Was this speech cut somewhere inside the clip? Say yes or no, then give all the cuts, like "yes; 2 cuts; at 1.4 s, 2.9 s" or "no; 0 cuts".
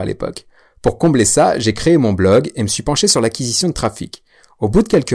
no; 0 cuts